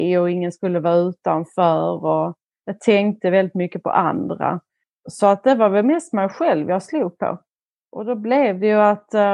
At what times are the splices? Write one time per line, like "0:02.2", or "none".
none